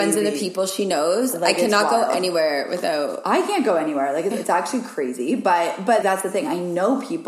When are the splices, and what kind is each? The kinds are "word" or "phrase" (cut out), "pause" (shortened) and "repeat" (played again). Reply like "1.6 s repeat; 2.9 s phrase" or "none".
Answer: 4.3 s word; 6.0 s word